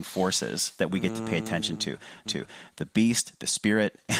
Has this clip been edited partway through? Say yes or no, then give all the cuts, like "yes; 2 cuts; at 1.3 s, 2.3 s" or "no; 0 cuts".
yes; 1 cut; at 2.3 s